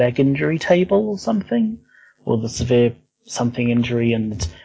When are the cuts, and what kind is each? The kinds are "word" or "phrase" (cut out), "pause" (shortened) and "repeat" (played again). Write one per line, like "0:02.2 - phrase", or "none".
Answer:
none